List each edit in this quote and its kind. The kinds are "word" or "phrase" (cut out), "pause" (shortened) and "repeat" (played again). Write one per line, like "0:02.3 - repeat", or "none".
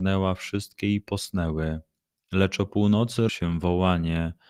0:03.3 - word